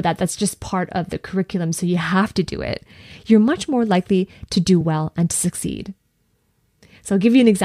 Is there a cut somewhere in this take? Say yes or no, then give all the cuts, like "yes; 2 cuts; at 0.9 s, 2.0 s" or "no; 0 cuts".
no; 0 cuts